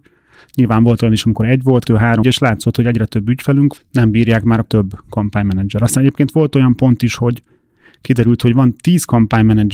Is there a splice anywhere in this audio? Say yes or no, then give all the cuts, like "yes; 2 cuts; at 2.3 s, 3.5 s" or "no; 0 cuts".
yes; 4 cuts; at 1.9 s, 2.2 s, 3.8 s, 4.6 s